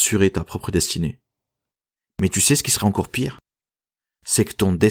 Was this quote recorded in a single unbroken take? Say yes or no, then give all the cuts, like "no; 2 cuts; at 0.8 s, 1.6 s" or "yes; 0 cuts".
yes; 0 cuts